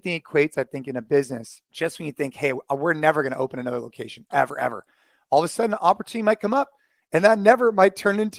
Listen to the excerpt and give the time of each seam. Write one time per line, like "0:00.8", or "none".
0:01.7
0:04.3